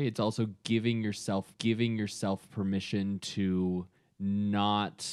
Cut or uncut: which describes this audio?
cut